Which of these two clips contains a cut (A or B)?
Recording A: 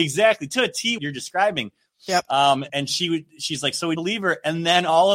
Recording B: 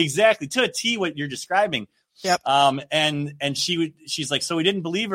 A